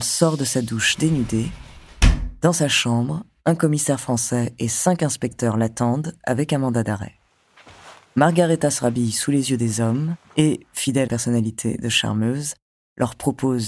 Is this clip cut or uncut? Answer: cut